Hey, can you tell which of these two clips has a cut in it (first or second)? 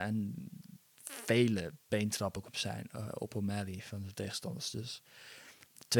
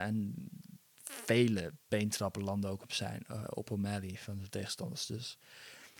first